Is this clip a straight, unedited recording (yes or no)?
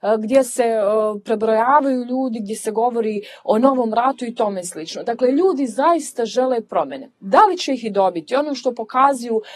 yes